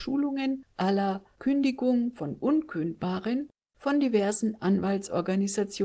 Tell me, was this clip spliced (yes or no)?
no